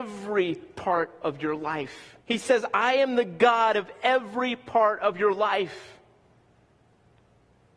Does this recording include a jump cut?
yes; 1 cut; at 2.2 s

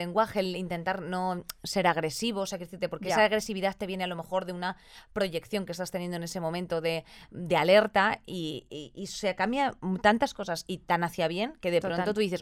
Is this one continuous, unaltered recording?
yes; 0 cuts

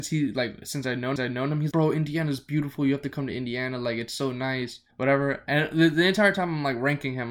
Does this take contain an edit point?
yes; 3 cuts; at 1.2 s, 1.7 s, 4.9 s

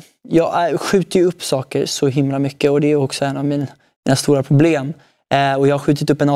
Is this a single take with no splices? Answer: yes; 0 cuts

